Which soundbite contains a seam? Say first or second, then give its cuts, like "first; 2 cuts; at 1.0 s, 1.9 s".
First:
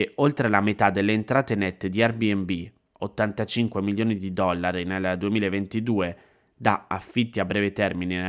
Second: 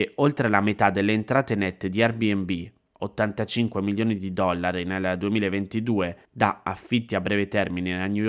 second; 1 cut; at 6.2 s